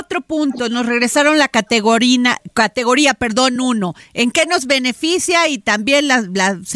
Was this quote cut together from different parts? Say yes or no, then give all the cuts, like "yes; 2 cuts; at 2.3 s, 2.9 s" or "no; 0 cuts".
no; 0 cuts